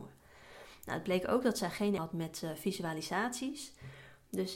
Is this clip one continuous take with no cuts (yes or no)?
no